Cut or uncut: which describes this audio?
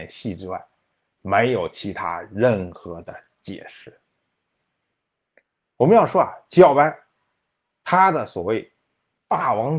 uncut